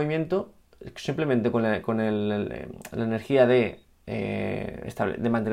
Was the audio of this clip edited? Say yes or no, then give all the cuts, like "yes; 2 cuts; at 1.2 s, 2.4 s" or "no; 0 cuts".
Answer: no; 0 cuts